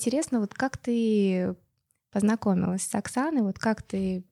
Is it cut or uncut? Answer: uncut